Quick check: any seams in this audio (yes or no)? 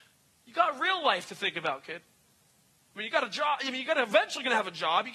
no